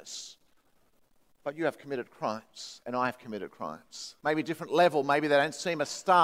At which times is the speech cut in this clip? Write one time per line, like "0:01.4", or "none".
0:04.2